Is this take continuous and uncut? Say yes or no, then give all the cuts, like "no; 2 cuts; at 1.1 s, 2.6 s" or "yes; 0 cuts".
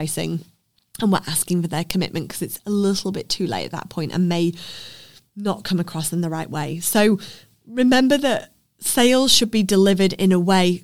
yes; 0 cuts